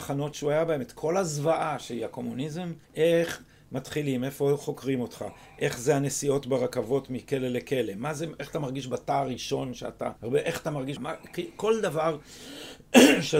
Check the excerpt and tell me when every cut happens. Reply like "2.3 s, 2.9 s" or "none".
2.8 s, 10.2 s, 11.0 s